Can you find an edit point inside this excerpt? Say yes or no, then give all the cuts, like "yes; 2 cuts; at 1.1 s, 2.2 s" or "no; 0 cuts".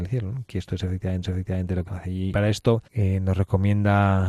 yes; 4 cuts; at 1.2 s, 1.9 s, 2.3 s, 2.9 s